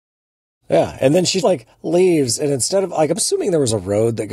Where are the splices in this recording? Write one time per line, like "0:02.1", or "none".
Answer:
0:01.4

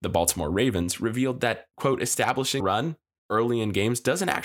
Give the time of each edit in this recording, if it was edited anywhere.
0:02.6

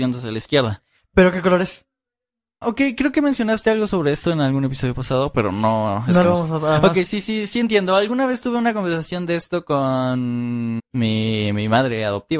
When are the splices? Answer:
0:02.6
0:06.2
0:07.1
0:10.8

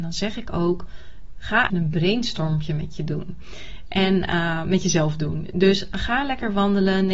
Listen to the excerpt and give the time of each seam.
0:01.7

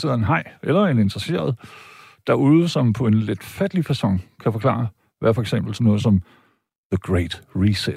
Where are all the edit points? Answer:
none

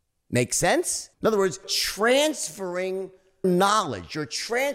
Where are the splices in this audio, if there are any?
0:01.1
0:01.6
0:03.4

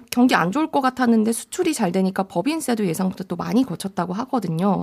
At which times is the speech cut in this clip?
none

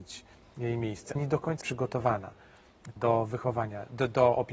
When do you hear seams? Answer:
0:01.2
0:01.6
0:03.0

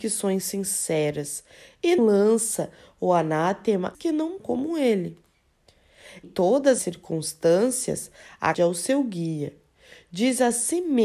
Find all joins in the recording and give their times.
0:02.0
0:03.9
0:04.4
0:06.2
0:06.8
0:08.5

